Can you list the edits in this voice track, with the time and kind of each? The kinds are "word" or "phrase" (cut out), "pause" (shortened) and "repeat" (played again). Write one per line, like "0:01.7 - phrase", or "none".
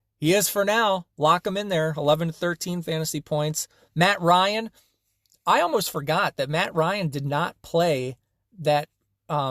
none